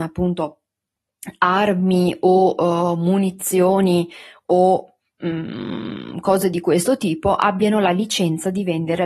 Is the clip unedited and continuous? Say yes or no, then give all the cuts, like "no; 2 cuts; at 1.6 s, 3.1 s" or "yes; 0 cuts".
yes; 0 cuts